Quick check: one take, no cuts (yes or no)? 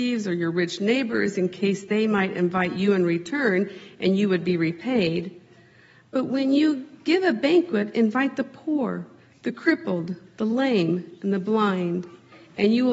yes